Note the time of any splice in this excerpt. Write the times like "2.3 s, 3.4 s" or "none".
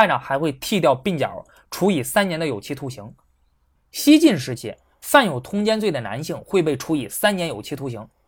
none